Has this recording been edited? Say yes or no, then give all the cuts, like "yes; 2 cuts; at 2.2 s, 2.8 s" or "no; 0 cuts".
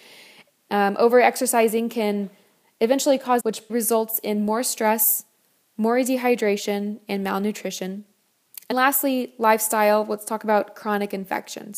yes; 3 cuts; at 3.4 s, 3.7 s, 8.7 s